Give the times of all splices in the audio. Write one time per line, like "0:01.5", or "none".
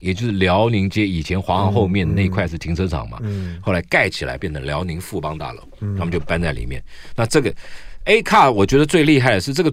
none